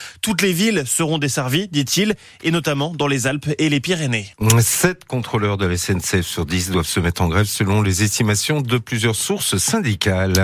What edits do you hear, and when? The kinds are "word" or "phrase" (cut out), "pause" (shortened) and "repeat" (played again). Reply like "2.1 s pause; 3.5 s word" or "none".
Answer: none